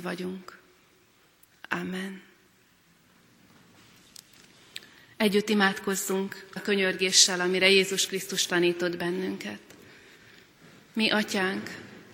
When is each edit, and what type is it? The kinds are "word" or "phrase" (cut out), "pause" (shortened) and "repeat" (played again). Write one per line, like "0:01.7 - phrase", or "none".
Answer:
0:06.6 - word